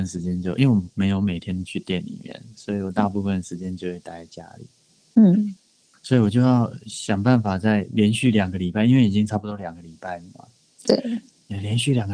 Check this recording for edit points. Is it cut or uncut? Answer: uncut